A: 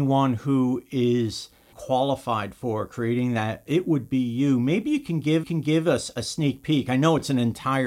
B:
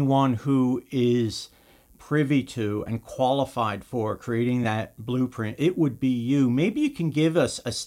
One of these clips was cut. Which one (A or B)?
A